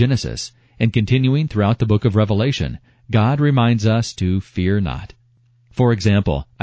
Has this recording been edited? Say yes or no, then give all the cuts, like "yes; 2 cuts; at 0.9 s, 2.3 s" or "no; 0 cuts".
no; 0 cuts